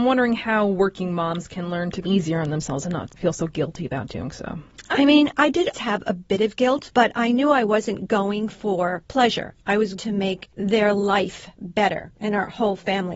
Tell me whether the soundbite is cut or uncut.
cut